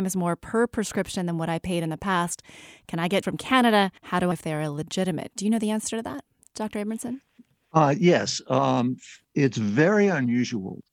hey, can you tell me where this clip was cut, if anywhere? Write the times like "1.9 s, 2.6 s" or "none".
3.2 s, 4.0 s, 4.3 s, 9.2 s